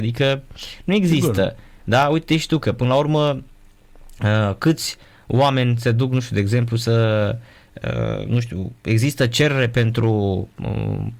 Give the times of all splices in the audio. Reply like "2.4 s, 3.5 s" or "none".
none